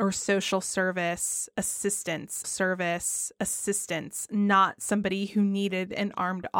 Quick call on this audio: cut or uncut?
cut